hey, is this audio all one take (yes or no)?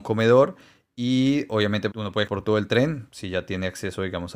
no